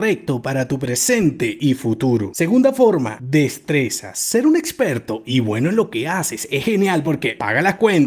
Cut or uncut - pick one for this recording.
uncut